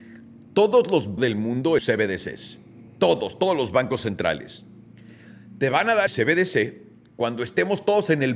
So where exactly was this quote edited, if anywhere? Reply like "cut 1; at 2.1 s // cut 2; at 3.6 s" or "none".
cut 1; at 1.2 s // cut 2; at 1.8 s // cut 3; at 2.9 s // cut 4; at 6.1 s